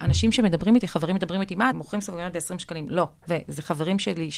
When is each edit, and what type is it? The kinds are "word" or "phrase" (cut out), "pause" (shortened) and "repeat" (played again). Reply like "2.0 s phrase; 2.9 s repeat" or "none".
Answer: 1.7 s word

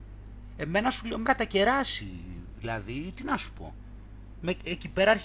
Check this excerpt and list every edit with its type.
1.2 s word

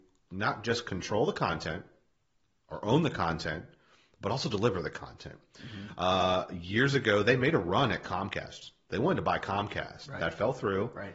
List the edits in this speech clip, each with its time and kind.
none

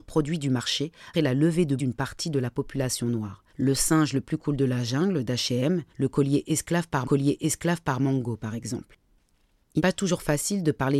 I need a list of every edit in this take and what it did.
1.1 s word; 1.8 s word; 3.5 s pause; 5.9 s pause; 7.0 s repeat; 9.8 s word

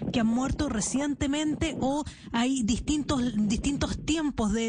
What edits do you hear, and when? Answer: none

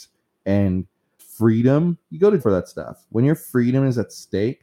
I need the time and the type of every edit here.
1.2 s phrase; 2.4 s word

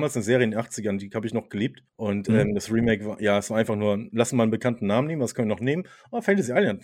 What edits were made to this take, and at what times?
1.9 s pause

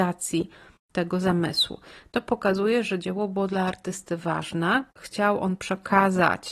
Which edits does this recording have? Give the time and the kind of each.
4.9 s word

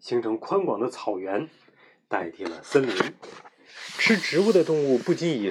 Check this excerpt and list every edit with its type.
none

